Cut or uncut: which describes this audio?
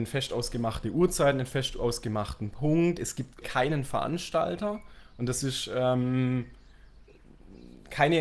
cut